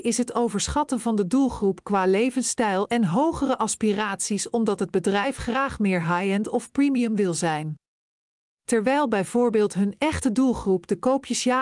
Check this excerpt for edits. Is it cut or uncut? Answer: uncut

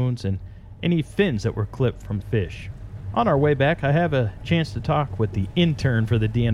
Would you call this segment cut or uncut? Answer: cut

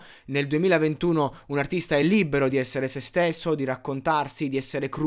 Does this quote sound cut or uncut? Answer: uncut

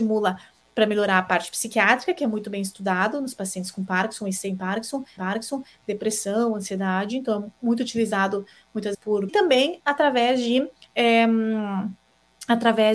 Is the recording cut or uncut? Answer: cut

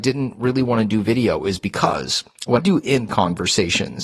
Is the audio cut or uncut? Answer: cut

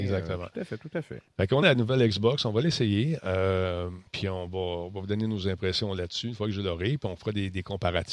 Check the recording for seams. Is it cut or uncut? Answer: cut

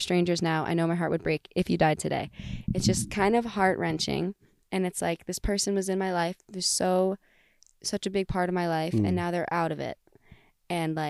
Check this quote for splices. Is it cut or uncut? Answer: uncut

